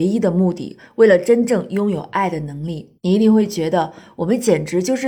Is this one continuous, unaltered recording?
no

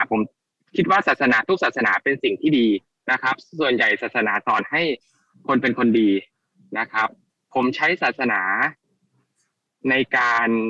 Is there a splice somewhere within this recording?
no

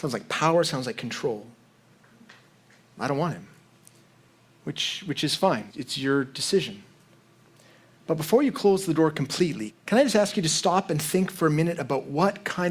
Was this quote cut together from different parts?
yes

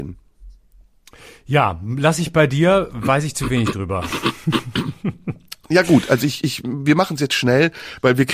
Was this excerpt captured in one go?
yes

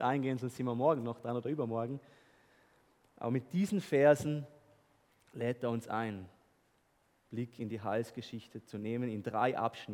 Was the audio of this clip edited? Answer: no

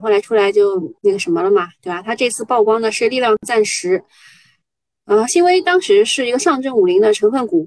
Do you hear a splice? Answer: yes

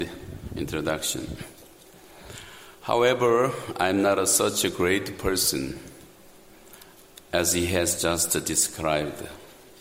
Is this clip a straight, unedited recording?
yes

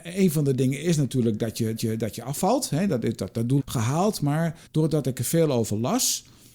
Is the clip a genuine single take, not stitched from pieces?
no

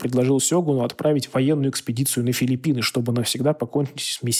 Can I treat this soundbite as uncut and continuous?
yes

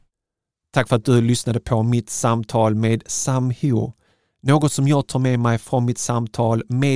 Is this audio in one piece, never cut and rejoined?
yes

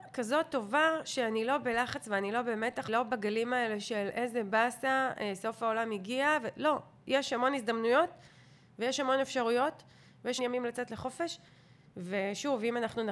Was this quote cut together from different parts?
yes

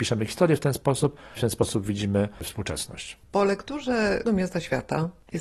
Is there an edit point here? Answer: yes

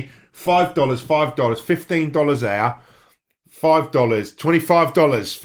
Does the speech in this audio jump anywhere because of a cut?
no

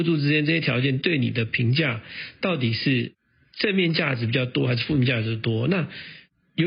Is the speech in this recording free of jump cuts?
yes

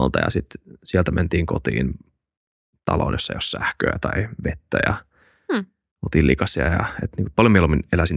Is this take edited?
no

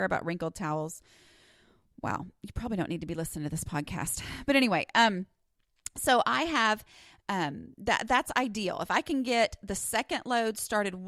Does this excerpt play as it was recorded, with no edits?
yes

